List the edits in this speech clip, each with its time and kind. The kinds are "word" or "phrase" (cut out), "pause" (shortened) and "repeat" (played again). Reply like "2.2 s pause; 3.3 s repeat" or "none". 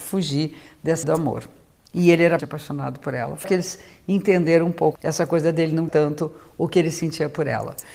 1.0 s word; 2.4 s word; 3.4 s word; 4.9 s word; 5.9 s word